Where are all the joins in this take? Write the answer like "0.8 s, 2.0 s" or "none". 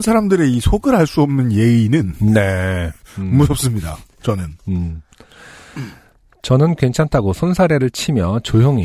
none